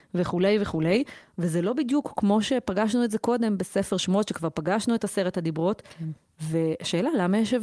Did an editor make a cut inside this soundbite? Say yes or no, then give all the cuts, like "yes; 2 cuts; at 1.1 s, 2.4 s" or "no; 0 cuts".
no; 0 cuts